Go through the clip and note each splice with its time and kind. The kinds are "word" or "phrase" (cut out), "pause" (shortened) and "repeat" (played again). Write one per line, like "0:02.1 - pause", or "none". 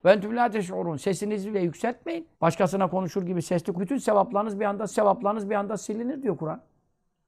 0:01.5 - word
0:02.3 - pause
0:03.7 - word
0:04.9 - repeat